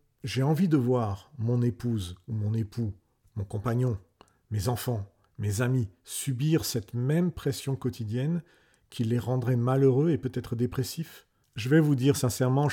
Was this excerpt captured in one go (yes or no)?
yes